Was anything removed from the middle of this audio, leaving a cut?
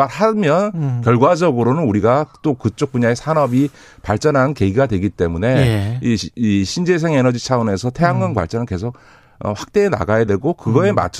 no; 0 cuts

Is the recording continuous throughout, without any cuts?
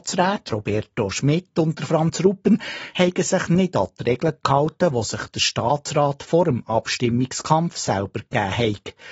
yes; 0 cuts

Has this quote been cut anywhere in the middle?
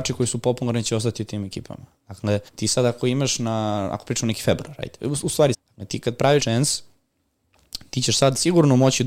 yes; 3 cuts; at 2.5 s, 5.5 s, 6.4 s

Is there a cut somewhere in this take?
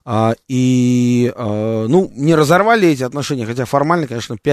no; 0 cuts

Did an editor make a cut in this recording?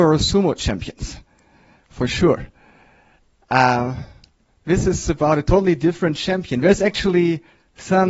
no; 0 cuts

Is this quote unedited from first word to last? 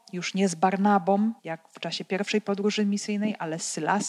no; 1 cut; at 1.4 s

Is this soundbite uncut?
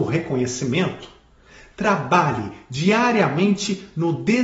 yes; 0 cuts

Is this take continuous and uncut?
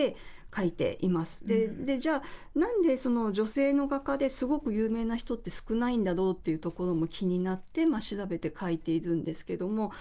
yes; 0 cuts

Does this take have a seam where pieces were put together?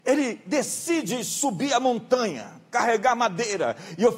no; 0 cuts

